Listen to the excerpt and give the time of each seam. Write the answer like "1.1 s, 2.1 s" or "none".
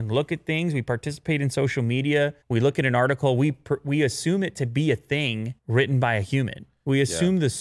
2.4 s, 5.6 s